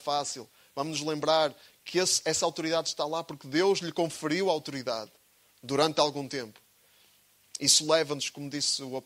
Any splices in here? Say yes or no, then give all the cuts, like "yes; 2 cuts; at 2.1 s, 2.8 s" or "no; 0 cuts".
no; 0 cuts